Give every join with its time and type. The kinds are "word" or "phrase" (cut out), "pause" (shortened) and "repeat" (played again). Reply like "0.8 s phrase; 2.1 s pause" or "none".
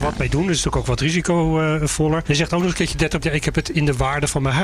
2.2 s word; 3.2 s word